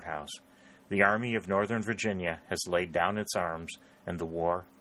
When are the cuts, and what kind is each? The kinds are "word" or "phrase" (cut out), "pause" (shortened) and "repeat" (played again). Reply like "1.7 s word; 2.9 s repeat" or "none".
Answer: none